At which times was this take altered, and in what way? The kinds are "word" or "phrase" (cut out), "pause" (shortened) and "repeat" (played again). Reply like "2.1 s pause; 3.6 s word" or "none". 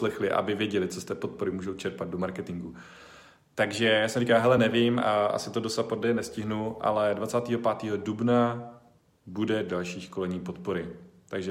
none

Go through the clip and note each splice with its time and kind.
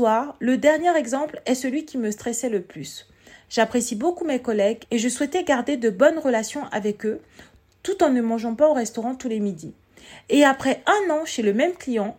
none

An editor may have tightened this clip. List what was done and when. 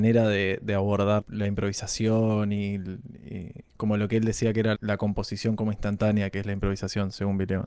1.2 s word; 3.7 s pause; 4.7 s word

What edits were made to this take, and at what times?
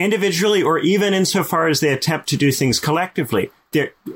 none

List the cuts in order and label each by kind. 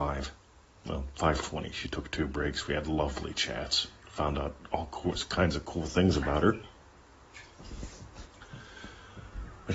none

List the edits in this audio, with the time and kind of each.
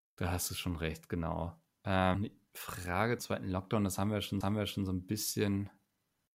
2.1 s phrase; 3.2 s word; 4.4 s repeat

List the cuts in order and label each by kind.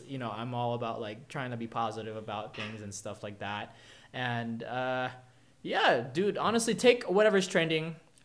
none

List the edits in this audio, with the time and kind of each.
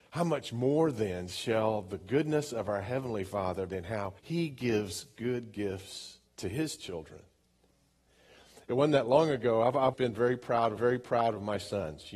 3.7 s phrase; 4.2 s pause; 6.3 s pause; 9.9 s word; 10.8 s repeat

